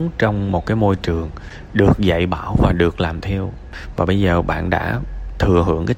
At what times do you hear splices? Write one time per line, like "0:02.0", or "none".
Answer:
none